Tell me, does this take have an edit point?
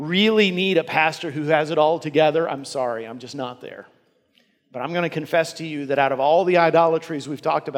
no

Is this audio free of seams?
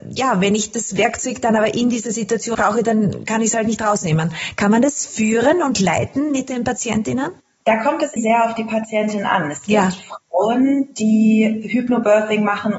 no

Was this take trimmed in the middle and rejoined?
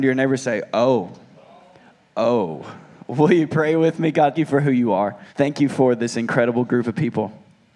yes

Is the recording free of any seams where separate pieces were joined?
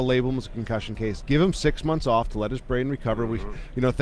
yes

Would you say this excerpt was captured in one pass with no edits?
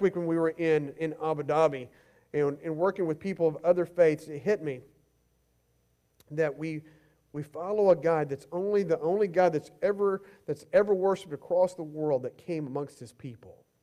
yes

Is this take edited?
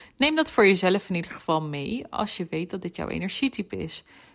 no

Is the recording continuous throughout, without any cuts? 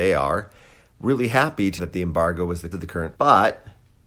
no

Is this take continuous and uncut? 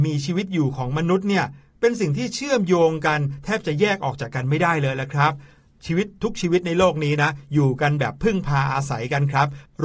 yes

